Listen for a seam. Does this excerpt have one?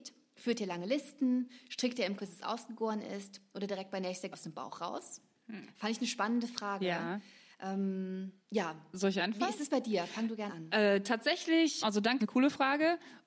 yes; 6 cuts; at 2.2 s, 4.3 s, 8.4 s, 10.5 s, 11.8 s, 12.2 s

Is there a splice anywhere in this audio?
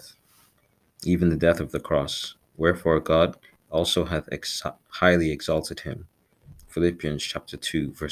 no; 0 cuts

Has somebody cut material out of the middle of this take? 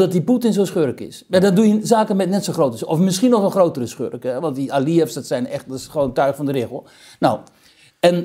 no; 0 cuts

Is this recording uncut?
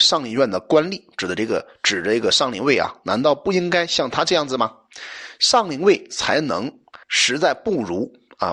no; 1 cut; at 7.0 s

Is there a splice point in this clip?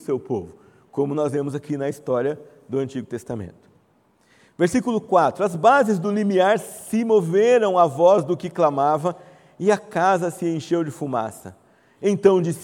no; 0 cuts

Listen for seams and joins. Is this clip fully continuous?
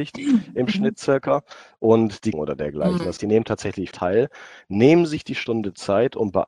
no; 3 cuts; at 2.3 s, 3.2 s, 3.9 s

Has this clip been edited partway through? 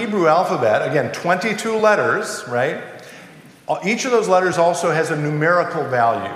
no; 0 cuts

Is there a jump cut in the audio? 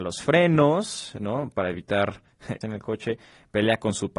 yes; 1 cut; at 2.6 s

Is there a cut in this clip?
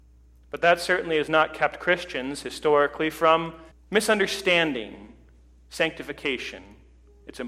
yes; 1 cut; at 3.7 s

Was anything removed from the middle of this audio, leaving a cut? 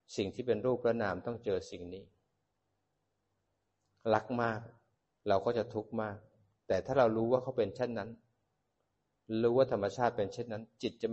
yes; 1 cut; at 5.0 s

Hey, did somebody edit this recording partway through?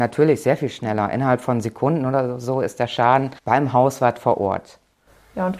yes; 1 cut; at 3.4 s

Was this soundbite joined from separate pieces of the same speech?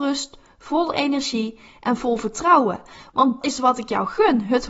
yes; 1 cut; at 3.4 s

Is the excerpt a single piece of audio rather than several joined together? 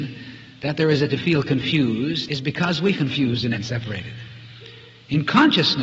no; 4 cuts; at 1.1 s, 2.3 s, 2.9 s, 3.5 s

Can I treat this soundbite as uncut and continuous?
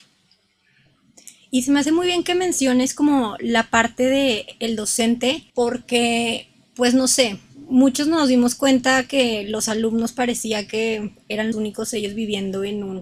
no; 2 cuts; at 5.5 s, 11.5 s

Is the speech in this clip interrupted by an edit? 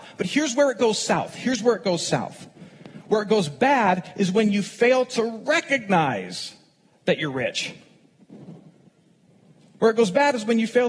no; 0 cuts

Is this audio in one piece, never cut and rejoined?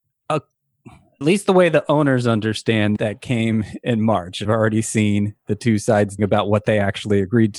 no; 4 cuts; at 1.2 s, 3.0 s, 4.4 s, 6.2 s

